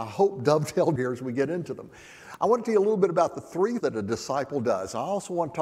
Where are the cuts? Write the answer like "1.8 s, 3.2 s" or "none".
1.0 s, 2.6 s, 3.8 s